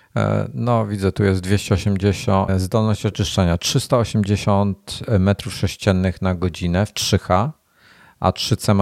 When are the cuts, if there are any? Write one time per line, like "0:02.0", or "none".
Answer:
0:02.5